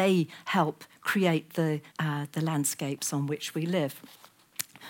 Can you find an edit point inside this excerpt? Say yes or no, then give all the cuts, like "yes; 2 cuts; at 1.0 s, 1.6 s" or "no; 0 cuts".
yes; 1 cut; at 1.9 s